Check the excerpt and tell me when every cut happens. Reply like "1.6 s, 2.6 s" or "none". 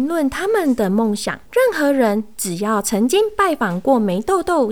1.5 s